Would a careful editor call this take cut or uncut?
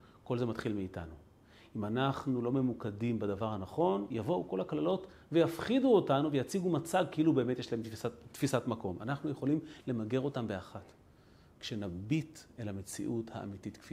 uncut